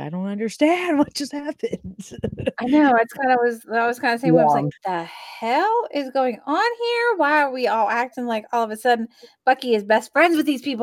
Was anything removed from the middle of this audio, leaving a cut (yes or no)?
yes